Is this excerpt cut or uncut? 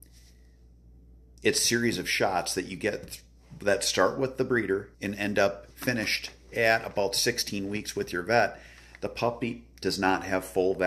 cut